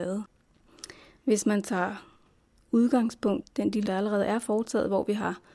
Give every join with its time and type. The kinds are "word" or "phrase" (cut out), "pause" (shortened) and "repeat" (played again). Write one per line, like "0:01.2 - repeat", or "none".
0:03.4 - word
0:03.9 - word